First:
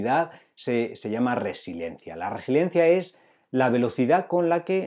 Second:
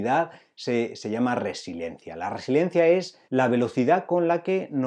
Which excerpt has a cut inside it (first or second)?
second